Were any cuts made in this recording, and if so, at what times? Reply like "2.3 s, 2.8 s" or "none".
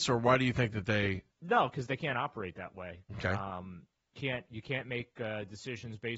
1.3 s, 4.1 s